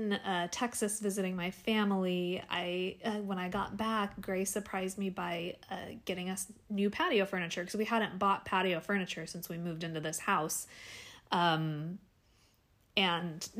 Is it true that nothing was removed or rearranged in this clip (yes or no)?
yes